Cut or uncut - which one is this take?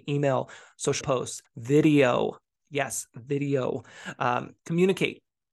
cut